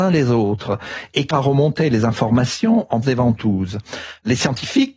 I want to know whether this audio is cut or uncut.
cut